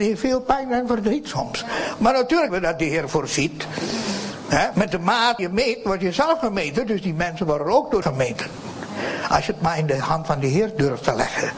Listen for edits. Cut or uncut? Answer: cut